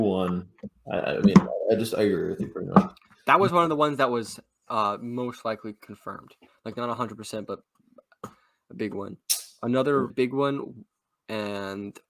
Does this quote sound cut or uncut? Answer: cut